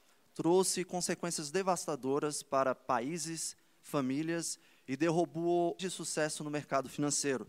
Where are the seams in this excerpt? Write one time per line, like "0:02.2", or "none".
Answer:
0:05.8

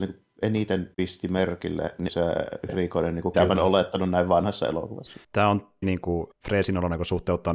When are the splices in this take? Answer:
0:00.9
0:02.1
0:02.7
0:03.3
0:05.2
0:05.8
0:06.3

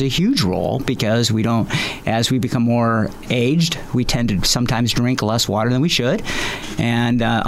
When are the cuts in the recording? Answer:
0:03.2

